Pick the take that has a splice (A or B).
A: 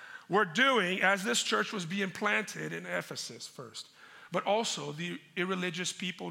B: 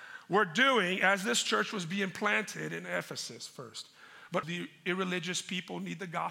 B